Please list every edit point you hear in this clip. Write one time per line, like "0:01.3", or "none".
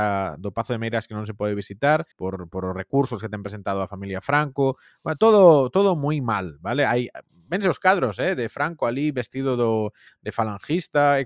0:02.1